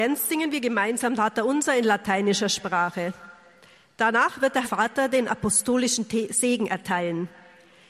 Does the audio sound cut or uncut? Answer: cut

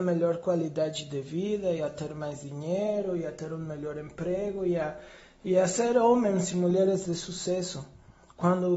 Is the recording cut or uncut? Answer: uncut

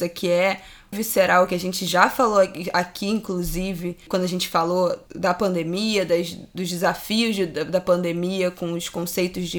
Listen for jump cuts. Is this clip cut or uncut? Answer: cut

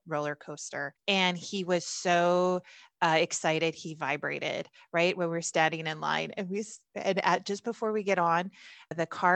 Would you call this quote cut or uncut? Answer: uncut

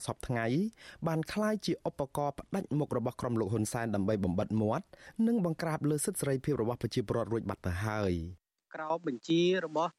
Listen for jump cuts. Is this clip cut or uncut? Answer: uncut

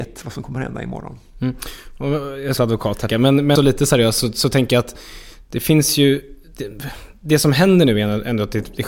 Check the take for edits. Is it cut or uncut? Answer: cut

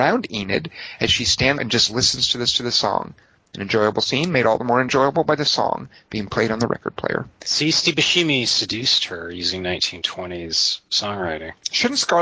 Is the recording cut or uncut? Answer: cut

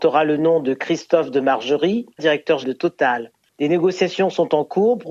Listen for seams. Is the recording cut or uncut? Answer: cut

